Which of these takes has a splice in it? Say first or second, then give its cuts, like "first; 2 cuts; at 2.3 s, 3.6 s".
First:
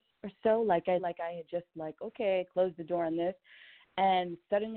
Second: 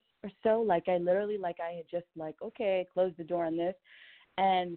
first; 1 cut; at 1.0 s